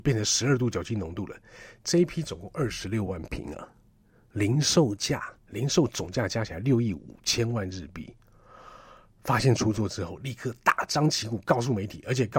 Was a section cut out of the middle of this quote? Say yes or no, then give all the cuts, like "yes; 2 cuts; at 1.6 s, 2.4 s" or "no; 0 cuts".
yes; 1 cut; at 5.4 s